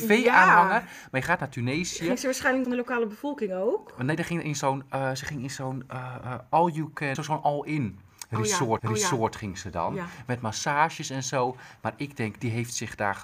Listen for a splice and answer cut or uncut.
cut